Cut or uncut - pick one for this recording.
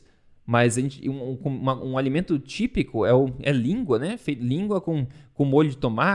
uncut